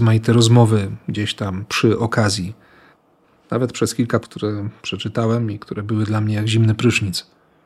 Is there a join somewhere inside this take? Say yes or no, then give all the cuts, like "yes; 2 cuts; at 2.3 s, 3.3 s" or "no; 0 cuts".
yes; 1 cut; at 4.2 s